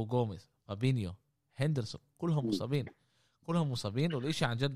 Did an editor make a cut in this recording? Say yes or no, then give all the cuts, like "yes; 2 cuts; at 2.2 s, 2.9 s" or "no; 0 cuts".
no; 0 cuts